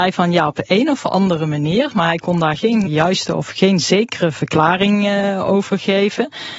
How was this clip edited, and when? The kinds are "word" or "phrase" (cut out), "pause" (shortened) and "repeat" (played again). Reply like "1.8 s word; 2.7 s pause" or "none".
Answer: 2.9 s word